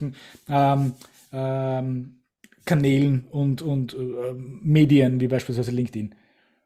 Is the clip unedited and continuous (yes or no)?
yes